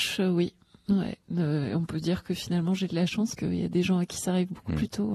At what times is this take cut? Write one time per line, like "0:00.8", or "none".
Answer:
0:03.4